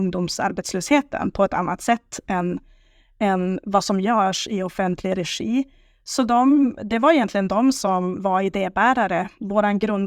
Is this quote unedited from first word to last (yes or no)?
yes